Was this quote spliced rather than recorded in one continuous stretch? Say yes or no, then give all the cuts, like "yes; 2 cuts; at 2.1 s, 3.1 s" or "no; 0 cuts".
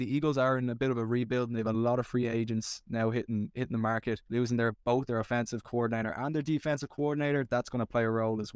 yes; 1 cut; at 4.2 s